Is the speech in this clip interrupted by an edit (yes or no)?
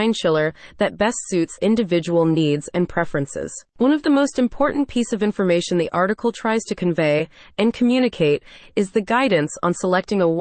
yes